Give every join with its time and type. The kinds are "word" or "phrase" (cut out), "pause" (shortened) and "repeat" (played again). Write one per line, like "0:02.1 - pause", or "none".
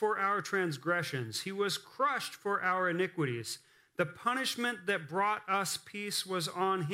none